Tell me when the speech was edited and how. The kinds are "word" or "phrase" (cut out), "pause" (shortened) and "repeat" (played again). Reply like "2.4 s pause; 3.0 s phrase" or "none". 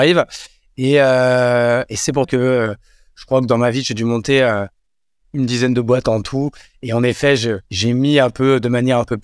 2.2 s word; 7.7 s pause

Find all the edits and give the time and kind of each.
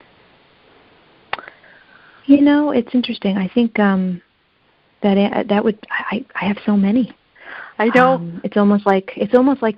none

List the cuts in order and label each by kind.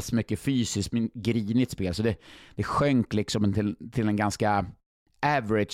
none

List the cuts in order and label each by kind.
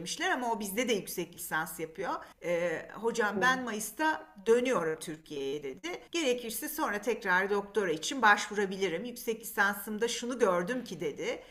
2.3 s pause; 6.1 s pause

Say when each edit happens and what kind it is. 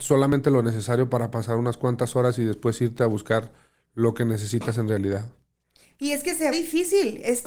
6.5 s word

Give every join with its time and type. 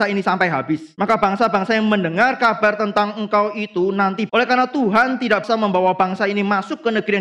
4.3 s word; 5.4 s word

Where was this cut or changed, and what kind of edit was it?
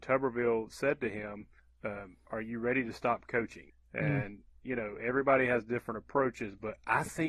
none

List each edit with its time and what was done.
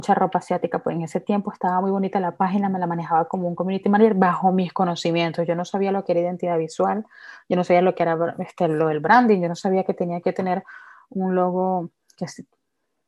none

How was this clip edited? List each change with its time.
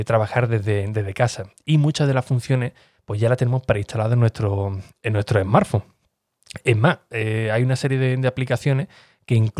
none

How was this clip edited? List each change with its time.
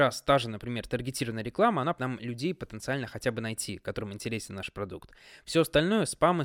2.0 s word

